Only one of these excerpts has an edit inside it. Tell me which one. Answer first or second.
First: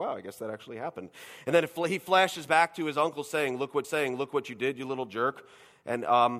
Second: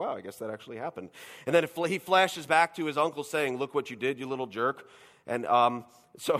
first